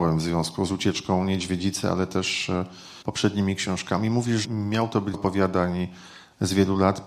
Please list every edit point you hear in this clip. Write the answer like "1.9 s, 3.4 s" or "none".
3.0 s, 4.4 s, 5.1 s

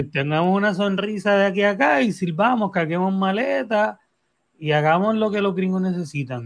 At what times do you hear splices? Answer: none

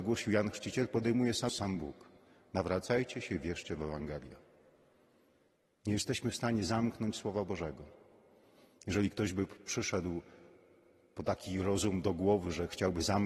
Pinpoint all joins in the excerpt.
1.5 s

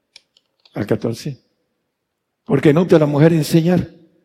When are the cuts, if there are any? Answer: 2.9 s

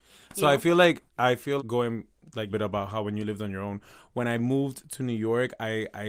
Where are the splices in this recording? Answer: 1.1 s, 1.6 s, 2.5 s

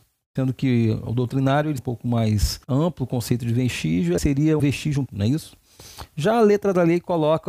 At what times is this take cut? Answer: 1.8 s, 2.6 s, 4.2 s, 4.6 s, 5.1 s

